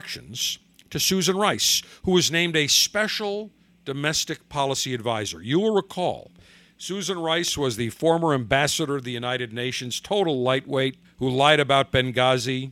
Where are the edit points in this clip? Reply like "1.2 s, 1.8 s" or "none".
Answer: 11.0 s